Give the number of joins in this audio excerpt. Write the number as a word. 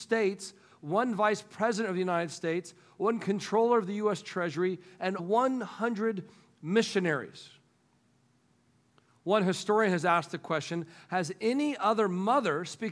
one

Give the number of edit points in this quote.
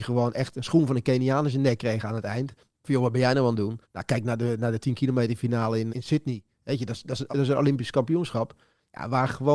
four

